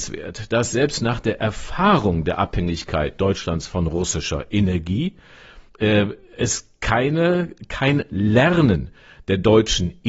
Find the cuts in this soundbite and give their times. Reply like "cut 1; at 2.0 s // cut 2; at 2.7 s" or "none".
cut 1; at 5.7 s